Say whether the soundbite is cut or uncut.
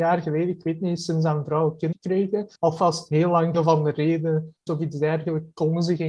cut